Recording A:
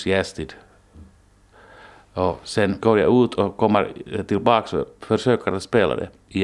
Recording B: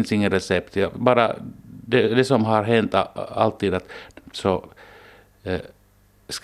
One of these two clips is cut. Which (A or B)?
B